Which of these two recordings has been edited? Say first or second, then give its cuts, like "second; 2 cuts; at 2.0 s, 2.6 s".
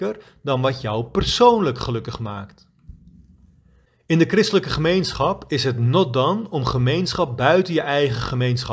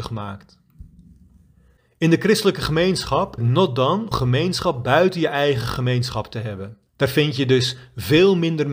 second; 3 cuts; at 3.4 s, 4.1 s, 6.9 s